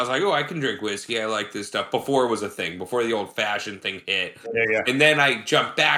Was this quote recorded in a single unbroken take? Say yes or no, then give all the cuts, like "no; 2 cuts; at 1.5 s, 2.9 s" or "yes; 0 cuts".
yes; 0 cuts